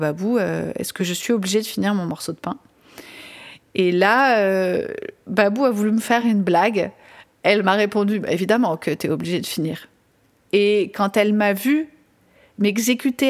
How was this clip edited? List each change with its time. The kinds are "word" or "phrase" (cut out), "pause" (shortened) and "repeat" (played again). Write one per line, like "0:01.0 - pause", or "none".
none